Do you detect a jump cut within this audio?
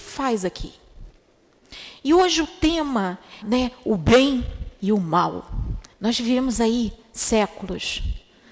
yes; 2 cuts; at 3.4 s, 5.9 s

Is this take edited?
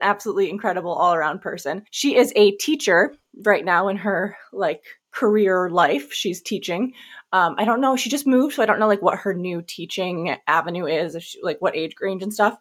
yes; 2 cuts; at 1.9 s, 5.0 s

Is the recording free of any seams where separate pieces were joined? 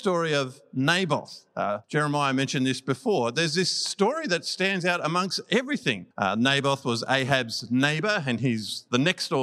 no; 2 cuts; at 1.8 s, 6.1 s

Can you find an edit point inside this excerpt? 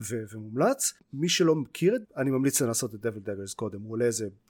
yes; 2 cuts; at 1.0 s, 2.0 s

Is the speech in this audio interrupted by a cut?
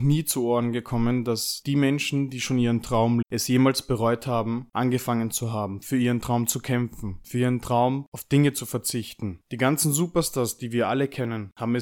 yes; 1 cut; at 3.2 s

